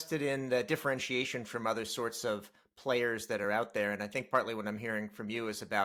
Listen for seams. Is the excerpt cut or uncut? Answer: uncut